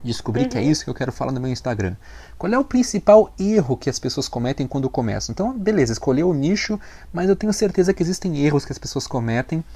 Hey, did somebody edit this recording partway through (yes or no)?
no